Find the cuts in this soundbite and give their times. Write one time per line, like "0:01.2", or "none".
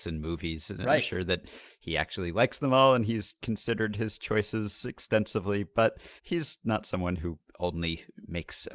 0:06.2